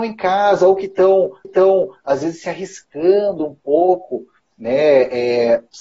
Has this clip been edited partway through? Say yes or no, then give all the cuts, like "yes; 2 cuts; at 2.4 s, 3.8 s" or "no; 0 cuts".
yes; 1 cut; at 1.4 s